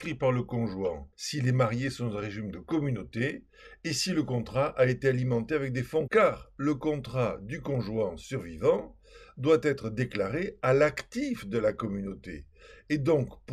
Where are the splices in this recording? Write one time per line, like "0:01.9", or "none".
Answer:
0:01.1
0:06.1